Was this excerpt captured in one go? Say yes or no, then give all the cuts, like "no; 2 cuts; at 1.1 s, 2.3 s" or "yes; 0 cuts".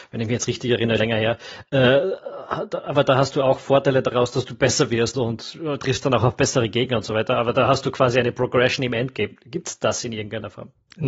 no; 2 cuts; at 1.0 s, 5.1 s